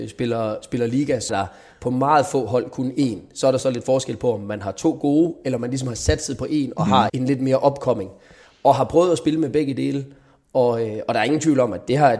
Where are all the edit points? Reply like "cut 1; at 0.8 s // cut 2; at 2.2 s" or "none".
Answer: cut 1; at 1.3 s // cut 2; at 7.1 s